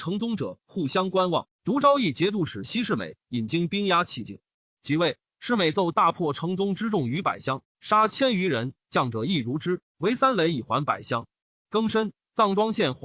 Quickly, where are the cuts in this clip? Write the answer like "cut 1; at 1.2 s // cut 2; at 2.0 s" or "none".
none